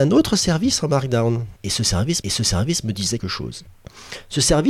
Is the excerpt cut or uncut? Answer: cut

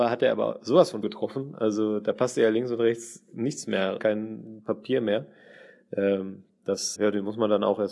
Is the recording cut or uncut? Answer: cut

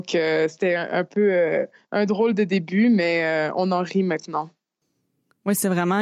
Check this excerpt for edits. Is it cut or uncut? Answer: uncut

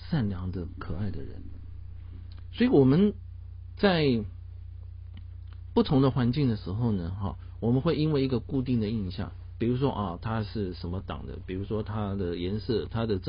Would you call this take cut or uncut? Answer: uncut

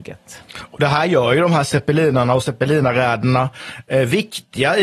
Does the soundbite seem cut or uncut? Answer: uncut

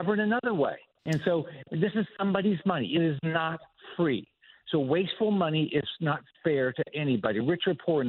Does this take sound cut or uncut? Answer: uncut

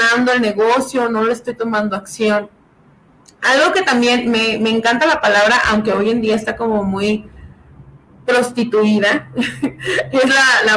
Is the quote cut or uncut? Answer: uncut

